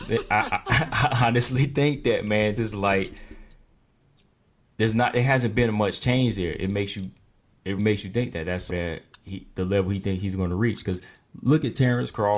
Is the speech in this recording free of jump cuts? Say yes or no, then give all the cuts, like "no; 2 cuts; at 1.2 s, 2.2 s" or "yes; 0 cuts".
no; 3 cuts; at 2.6 s, 7.8 s, 8.7 s